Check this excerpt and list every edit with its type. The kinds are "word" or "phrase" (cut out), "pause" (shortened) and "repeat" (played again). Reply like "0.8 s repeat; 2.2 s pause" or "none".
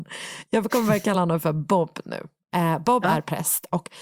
none